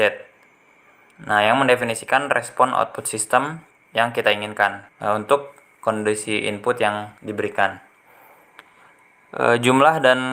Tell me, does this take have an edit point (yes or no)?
yes